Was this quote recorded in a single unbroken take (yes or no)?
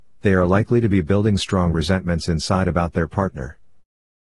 yes